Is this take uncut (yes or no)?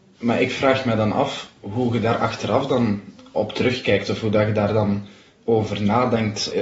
yes